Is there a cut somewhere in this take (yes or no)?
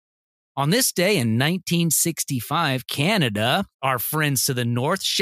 yes